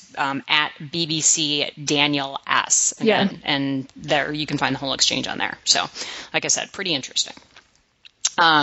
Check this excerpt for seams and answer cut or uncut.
uncut